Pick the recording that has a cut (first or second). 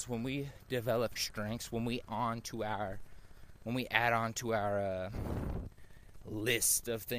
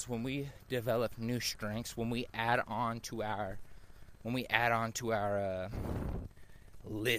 first